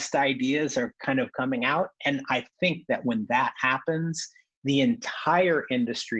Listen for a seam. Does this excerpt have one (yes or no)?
no